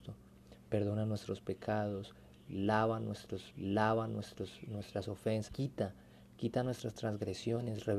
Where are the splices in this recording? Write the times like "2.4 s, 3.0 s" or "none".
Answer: 3.5 s, 5.5 s